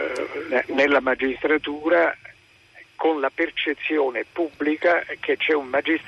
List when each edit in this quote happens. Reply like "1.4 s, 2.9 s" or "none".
none